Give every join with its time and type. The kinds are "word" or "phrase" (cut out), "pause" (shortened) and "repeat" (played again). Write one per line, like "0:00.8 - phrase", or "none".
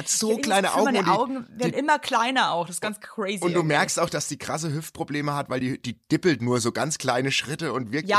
none